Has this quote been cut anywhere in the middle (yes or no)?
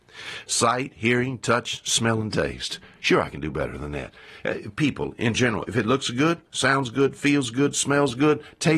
no